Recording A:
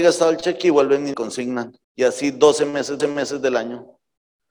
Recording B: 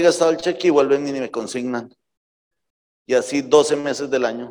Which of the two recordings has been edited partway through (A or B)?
A